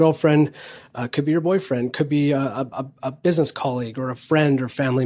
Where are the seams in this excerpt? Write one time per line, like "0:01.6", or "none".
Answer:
none